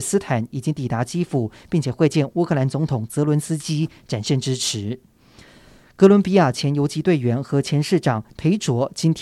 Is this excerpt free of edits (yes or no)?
yes